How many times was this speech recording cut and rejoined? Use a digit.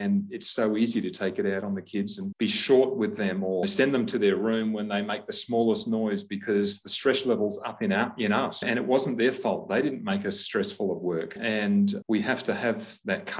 0